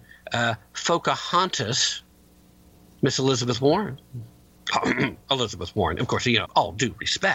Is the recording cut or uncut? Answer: cut